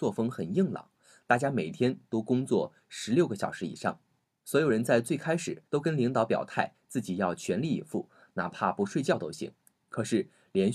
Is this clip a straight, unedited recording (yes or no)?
no